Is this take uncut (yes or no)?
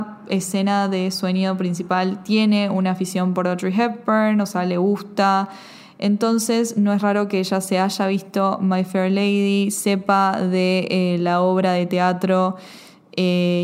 yes